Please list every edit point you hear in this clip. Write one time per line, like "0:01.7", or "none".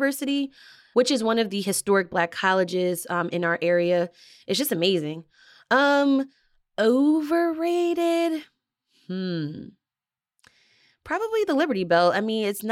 none